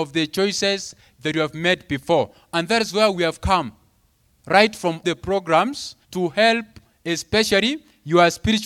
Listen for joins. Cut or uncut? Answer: cut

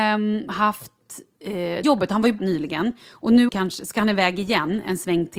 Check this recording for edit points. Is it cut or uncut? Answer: cut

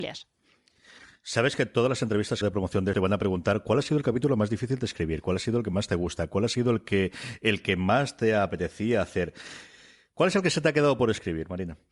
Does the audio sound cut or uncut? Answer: cut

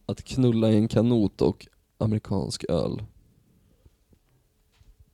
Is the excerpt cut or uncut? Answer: uncut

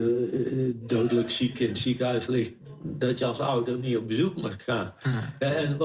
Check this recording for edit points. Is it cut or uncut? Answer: uncut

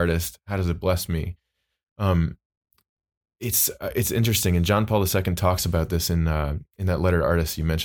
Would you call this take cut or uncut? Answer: uncut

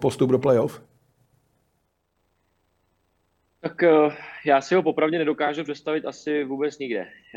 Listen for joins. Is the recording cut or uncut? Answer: uncut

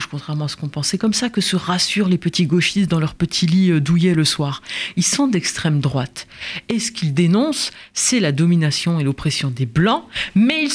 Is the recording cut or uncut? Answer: uncut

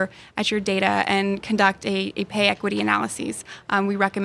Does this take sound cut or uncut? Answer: uncut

